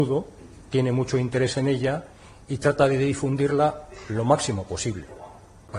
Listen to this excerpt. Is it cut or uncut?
uncut